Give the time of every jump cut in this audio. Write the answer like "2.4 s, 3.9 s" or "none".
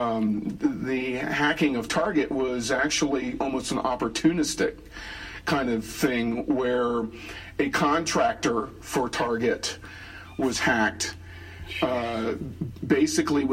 none